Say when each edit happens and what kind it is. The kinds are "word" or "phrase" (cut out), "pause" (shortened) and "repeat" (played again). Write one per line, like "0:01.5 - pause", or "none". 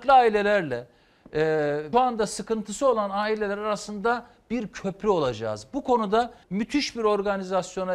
0:01.9 - word
0:06.4 - pause